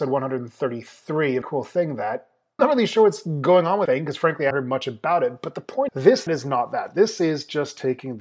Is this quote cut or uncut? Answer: cut